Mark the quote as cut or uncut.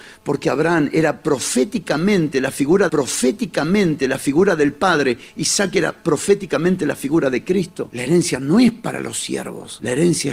cut